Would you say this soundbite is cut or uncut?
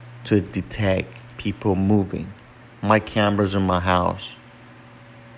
uncut